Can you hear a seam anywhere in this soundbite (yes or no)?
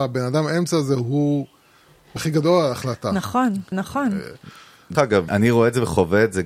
yes